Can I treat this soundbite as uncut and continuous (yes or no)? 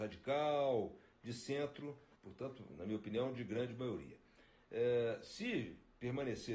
no